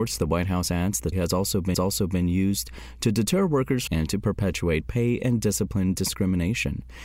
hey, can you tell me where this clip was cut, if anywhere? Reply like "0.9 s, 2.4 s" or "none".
1.1 s, 1.7 s, 3.9 s